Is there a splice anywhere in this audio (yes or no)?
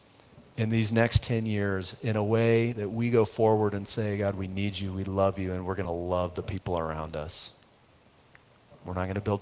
no